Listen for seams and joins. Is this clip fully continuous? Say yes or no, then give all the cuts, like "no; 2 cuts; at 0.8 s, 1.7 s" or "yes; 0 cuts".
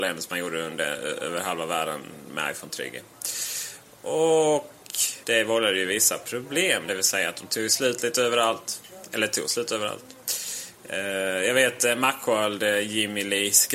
no; 1 cut; at 5.2 s